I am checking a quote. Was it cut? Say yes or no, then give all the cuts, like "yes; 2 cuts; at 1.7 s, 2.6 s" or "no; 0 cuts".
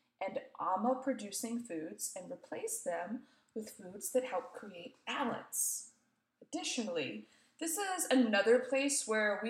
no; 0 cuts